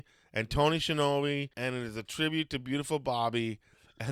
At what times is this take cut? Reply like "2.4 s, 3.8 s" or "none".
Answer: 1.5 s